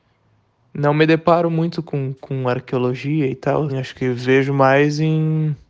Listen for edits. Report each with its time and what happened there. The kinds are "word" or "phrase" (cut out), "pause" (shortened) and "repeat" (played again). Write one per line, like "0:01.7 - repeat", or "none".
0:03.7 - word